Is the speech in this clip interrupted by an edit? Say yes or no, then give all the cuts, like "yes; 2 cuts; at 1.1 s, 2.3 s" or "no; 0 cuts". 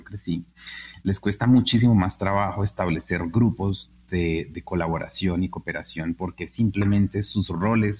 no; 0 cuts